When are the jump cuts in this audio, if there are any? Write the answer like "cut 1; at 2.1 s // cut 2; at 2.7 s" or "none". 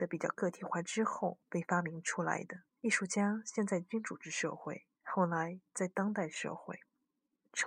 cut 1; at 1.4 s // cut 2; at 2.7 s // cut 3; at 4.9 s